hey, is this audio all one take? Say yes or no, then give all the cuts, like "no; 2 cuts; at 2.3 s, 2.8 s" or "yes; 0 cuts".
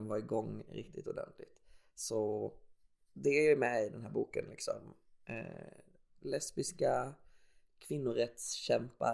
yes; 0 cuts